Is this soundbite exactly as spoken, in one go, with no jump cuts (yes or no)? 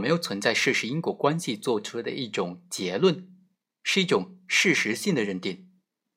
yes